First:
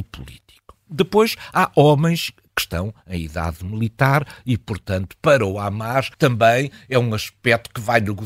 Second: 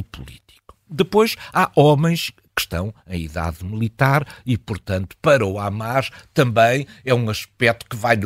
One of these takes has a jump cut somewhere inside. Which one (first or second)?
first